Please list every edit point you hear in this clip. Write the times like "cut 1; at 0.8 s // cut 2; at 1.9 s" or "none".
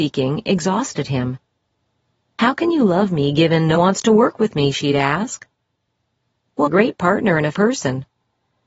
cut 1; at 3.7 s // cut 2; at 6.7 s // cut 3; at 7.5 s